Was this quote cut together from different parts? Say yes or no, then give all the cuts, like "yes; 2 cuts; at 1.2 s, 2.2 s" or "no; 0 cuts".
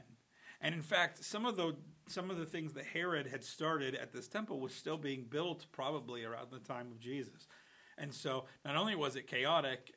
no; 0 cuts